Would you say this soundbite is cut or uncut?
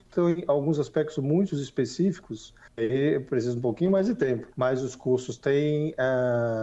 cut